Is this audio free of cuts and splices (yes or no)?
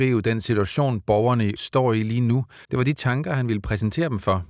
no